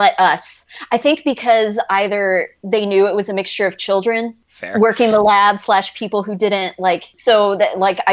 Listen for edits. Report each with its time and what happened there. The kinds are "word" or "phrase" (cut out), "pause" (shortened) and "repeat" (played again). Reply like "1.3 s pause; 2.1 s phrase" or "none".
none